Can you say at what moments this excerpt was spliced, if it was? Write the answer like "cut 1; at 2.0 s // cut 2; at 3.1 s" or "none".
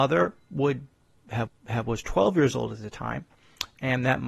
cut 1; at 1.5 s